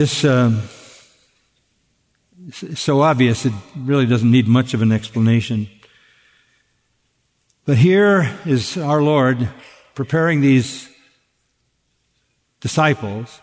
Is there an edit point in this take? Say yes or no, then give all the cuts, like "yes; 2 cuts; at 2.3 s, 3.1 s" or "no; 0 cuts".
no; 0 cuts